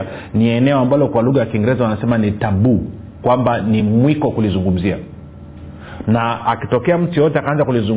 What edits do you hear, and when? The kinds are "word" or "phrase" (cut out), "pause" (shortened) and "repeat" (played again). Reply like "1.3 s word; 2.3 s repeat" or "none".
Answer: none

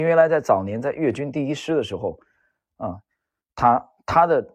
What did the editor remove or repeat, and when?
none

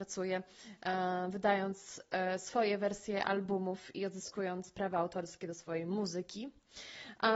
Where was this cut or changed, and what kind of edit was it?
none

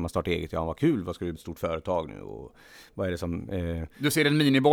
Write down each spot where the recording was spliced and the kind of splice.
1.4 s word

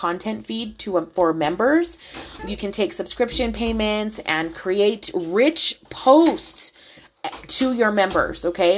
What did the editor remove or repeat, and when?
2.4 s word

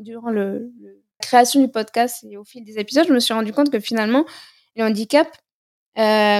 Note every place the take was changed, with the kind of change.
1.2 s word

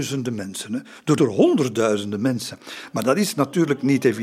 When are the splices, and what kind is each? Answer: 1.2 s word

